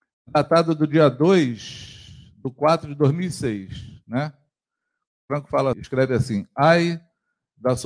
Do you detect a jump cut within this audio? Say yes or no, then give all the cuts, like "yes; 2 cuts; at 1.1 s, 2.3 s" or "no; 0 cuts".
yes; 1 cut; at 5.7 s